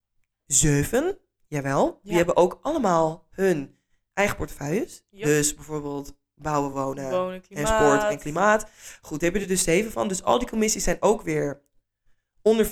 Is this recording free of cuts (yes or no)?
yes